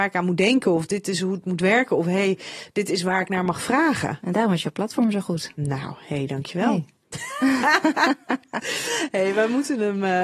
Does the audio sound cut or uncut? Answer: uncut